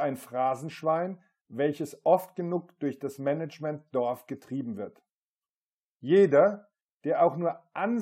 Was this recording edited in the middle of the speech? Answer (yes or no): no